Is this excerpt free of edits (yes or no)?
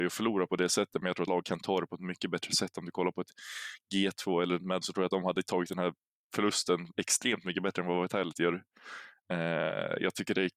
no